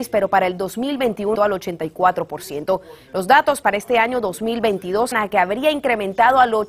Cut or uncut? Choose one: cut